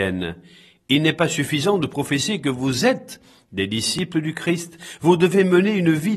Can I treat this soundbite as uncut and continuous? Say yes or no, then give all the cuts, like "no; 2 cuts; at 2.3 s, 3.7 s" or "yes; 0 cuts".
yes; 0 cuts